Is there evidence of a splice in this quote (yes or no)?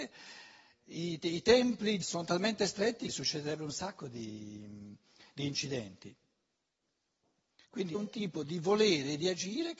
yes